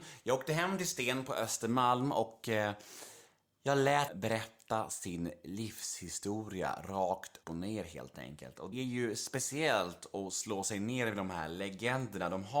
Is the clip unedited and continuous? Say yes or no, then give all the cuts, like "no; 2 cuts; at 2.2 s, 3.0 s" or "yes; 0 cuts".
no; 3 cuts; at 4.1 s, 7.4 s, 8.7 s